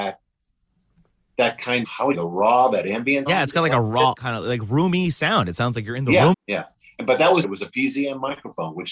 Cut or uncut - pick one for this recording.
cut